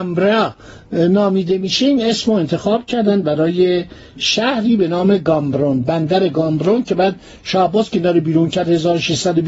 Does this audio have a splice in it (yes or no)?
no